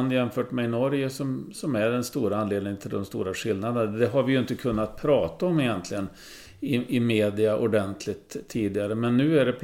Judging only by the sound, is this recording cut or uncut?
uncut